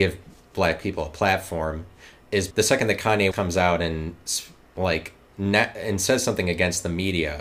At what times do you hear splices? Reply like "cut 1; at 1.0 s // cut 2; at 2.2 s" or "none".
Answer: cut 1; at 2.5 s // cut 2; at 3.3 s // cut 3; at 5.3 s